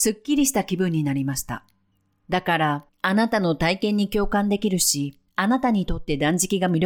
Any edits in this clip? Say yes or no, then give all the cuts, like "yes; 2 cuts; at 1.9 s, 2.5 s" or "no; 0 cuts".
yes; 3 cuts; at 1.9 s, 2.9 s, 5.3 s